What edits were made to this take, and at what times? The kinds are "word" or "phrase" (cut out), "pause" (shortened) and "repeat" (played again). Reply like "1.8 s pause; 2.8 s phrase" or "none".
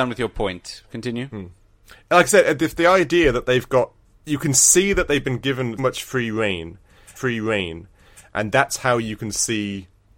4.0 s pause; 5.8 s word; 7.2 s repeat

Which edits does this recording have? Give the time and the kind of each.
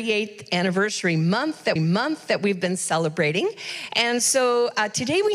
1.8 s repeat

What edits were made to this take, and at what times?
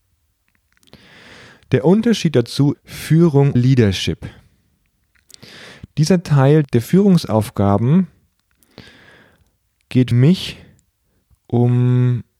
2.7 s word; 3.5 s word; 10.1 s word

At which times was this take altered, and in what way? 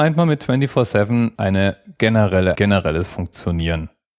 1.3 s word; 2.5 s phrase

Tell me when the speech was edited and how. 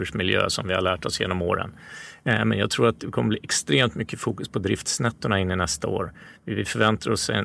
none

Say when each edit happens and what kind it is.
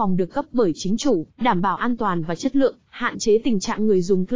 1.3 s pause

